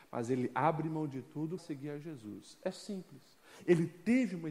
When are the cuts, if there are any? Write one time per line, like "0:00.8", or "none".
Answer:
0:01.6

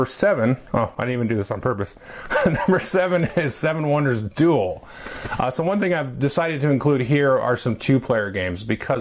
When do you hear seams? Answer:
none

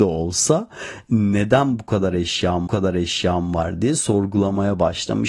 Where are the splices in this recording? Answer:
0:02.7

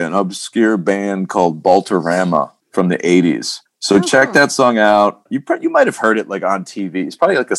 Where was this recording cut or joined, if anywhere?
0:02.6
0:03.7

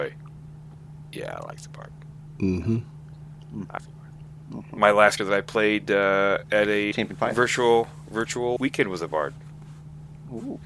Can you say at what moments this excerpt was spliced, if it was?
0:03.8
0:05.2
0:06.9
0:08.6

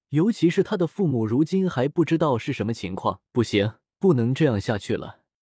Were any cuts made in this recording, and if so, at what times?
0:03.3
0:03.9

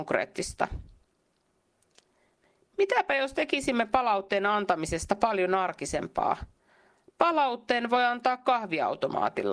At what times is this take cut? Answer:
none

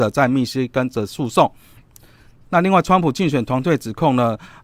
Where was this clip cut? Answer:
none

